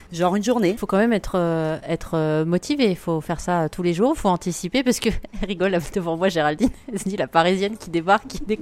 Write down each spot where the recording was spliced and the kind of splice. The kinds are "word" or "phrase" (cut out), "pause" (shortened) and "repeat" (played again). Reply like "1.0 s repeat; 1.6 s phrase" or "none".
none